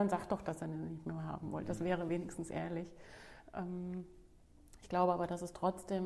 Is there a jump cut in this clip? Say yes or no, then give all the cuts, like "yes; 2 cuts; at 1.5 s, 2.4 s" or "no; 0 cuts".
no; 0 cuts